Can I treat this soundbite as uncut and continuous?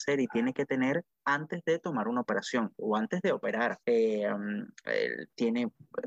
no; 2 cuts; at 1.1 s, 3.8 s

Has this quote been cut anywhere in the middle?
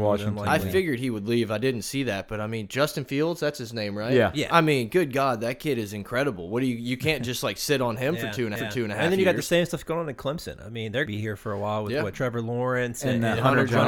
yes; 2 cuts; at 8.6 s, 11.1 s

